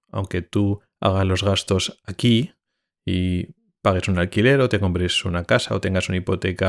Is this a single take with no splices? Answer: yes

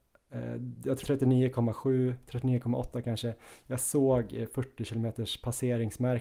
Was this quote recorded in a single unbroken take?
no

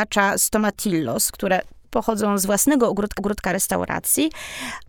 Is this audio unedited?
no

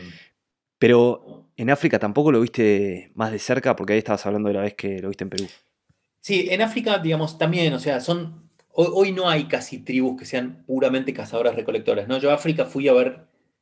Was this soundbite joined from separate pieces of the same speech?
yes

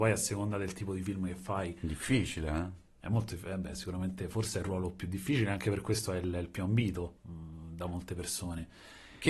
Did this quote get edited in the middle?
yes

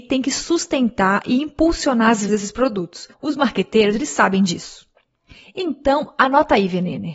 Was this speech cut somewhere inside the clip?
yes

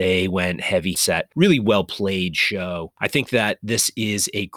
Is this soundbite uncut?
no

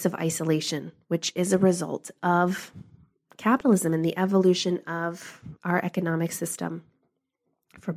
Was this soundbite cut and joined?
no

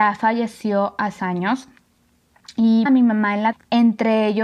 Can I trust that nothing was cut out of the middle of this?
no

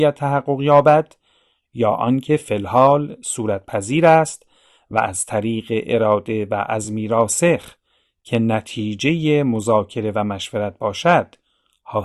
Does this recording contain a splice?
no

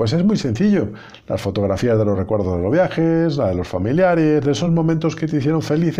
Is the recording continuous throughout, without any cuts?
yes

